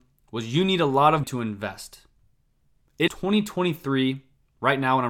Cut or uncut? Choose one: cut